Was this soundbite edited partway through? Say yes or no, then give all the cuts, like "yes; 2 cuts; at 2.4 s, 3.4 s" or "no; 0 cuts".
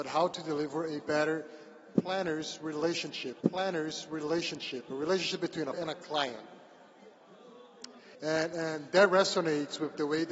yes; 3 cuts; at 3.4 s, 5.7 s, 8.1 s